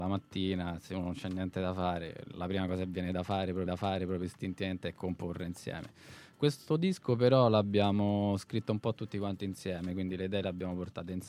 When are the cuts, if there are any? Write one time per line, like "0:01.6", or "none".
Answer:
0:03.7